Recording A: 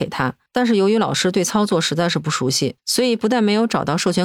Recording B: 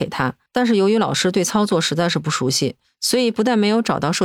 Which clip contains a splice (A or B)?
A